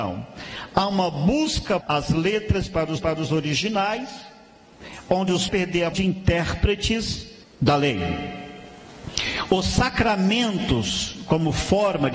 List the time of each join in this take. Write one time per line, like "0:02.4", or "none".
0:01.8
0:03.0
0:05.5
0:05.9
0:07.4